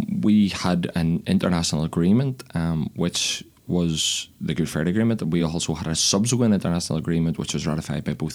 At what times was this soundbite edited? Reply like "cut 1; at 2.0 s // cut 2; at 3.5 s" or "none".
none